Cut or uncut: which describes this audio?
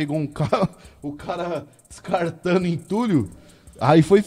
uncut